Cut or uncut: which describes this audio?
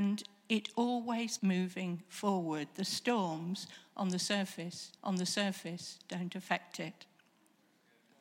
cut